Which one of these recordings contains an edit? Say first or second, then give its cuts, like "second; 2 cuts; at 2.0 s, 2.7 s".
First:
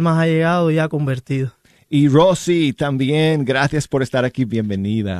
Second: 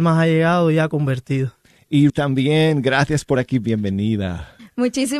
second; 2 cuts; at 2.1 s, 3.4 s